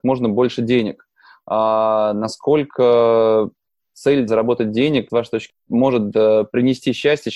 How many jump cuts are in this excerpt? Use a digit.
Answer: 3